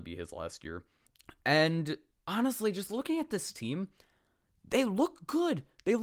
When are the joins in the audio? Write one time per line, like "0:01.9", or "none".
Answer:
none